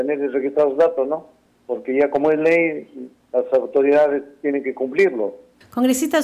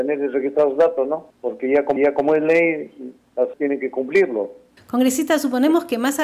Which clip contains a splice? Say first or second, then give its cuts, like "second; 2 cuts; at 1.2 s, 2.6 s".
second; 3 cuts; at 1.3 s, 2.0 s, 3.5 s